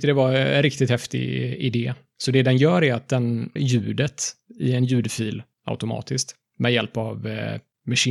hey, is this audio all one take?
no; 1 cut; at 3.6 s

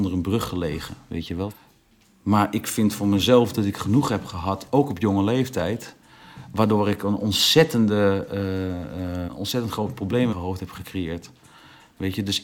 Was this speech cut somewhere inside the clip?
yes; 2 cuts; at 9.3 s, 10.3 s

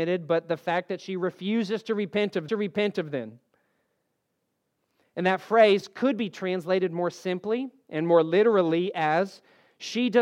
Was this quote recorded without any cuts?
no; 1 cut; at 2.5 s

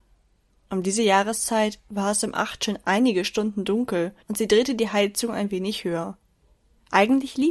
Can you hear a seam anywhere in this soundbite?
yes; 1 cut; at 4.2 s

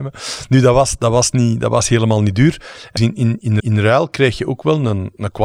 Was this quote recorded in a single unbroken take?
no; 2 cuts; at 3.0 s, 3.6 s

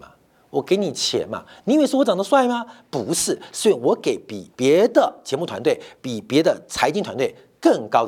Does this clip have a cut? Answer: yes; 1 cut; at 4.5 s

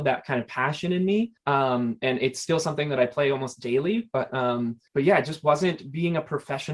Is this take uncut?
no; 2 cuts; at 1.4 s, 4.9 s

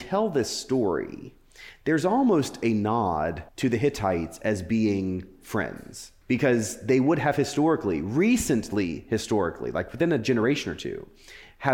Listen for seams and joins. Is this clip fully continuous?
no; 2 cuts; at 3.5 s, 6.2 s

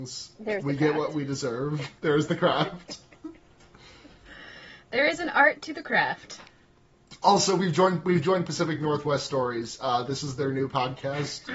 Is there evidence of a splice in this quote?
yes; 1 cut; at 2.0 s

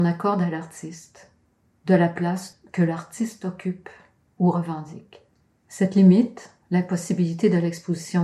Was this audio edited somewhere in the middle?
no; 0 cuts

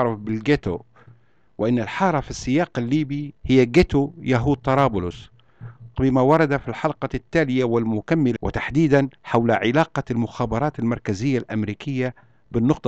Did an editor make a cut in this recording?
yes; 4 cuts; at 3.4 s, 5.9 s, 8.4 s, 9.2 s

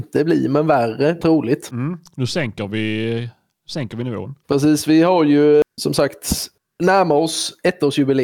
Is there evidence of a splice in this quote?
yes; 1 cut; at 1.2 s

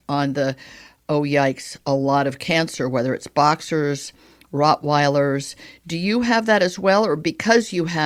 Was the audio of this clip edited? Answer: no; 0 cuts

